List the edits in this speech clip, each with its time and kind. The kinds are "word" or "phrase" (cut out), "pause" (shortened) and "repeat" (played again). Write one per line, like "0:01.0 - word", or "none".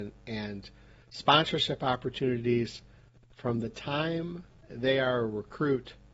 none